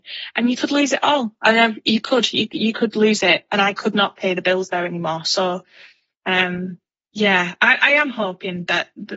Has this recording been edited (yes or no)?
no